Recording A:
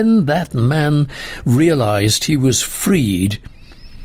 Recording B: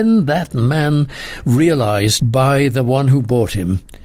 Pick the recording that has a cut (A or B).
B